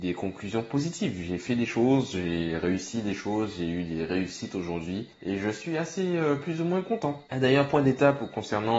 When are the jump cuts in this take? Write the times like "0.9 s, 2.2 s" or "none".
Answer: 5.1 s, 7.3 s